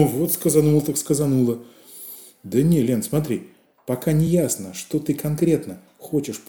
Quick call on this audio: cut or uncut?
uncut